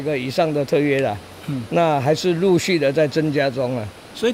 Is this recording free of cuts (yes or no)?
yes